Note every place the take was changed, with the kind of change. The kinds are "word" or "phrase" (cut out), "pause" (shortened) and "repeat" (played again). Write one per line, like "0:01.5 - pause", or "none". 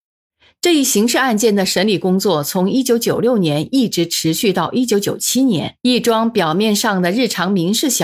0:05.8 - pause